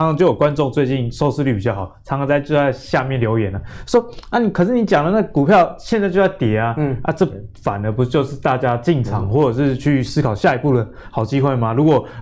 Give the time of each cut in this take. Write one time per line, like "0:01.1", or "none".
none